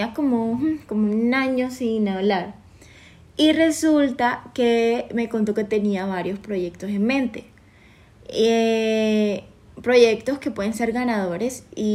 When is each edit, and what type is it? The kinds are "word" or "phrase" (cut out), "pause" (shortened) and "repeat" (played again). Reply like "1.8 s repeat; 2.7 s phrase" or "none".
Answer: none